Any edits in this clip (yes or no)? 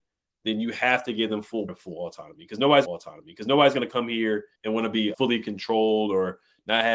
yes